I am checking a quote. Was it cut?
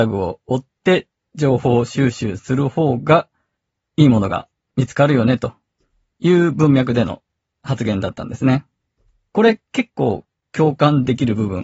no; 0 cuts

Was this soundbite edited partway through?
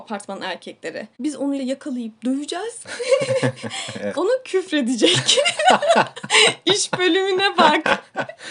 yes; 3 cuts; at 1.1 s, 1.6 s, 4.1 s

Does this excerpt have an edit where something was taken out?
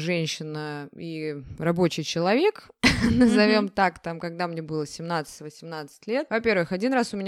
no; 0 cuts

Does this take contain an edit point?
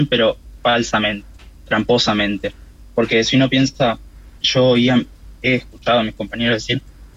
yes; 1 cut; at 4.4 s

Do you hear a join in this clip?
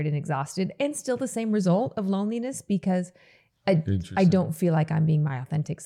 no; 0 cuts

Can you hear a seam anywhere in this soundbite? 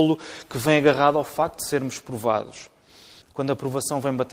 yes; 1 cut; at 3.2 s

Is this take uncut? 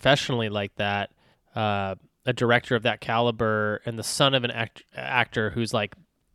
no; 1 cut; at 1.3 s

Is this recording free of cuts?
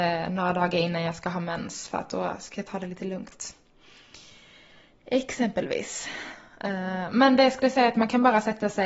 yes; 0 cuts

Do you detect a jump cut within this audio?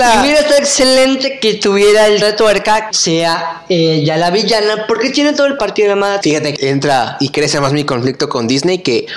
yes; 5 cuts; at 2.2 s, 2.9 s, 5.6 s, 6.2 s, 6.6 s

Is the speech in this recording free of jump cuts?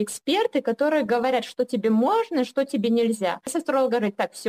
yes; 0 cuts

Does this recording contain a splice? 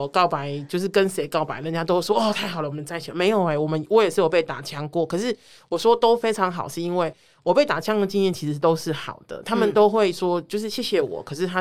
no; 0 cuts

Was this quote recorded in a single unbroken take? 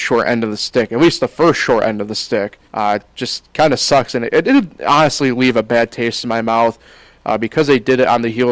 no; 1 cut; at 2.7 s

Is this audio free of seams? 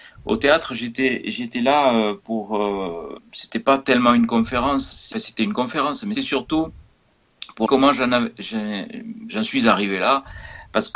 no; 4 cuts; at 3.2 s, 5.1 s, 6.1 s, 7.7 s

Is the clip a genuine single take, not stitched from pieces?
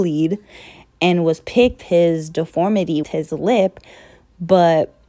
no; 2 cuts; at 1.8 s, 3.0 s

